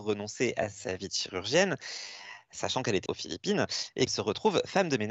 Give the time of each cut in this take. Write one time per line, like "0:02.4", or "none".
0:03.1
0:04.1